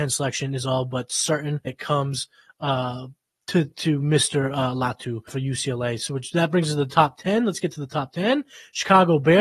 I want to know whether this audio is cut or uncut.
cut